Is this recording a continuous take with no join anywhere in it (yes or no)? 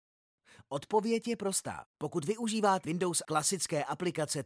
no